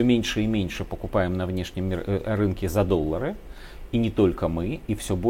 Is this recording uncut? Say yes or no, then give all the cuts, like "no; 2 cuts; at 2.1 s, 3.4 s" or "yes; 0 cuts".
yes; 0 cuts